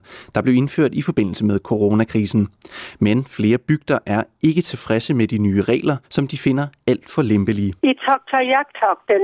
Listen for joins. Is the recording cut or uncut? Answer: cut